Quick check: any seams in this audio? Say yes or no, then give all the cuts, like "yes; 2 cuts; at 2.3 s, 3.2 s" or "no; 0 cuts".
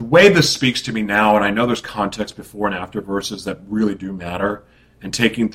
no; 0 cuts